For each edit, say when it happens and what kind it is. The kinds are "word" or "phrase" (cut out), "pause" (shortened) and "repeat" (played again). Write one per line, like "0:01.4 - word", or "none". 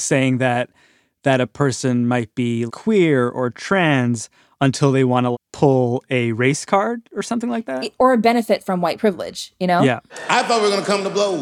0:02.7 - word
0:05.3 - word